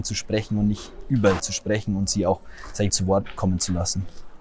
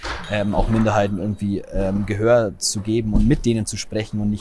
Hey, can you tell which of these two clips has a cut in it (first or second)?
first